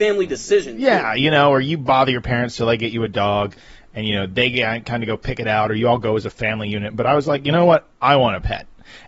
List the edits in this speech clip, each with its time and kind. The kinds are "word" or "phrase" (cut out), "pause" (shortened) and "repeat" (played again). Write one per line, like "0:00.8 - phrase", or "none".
none